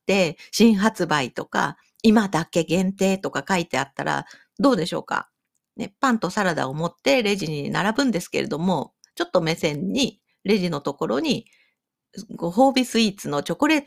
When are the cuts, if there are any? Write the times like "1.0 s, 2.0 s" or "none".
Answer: none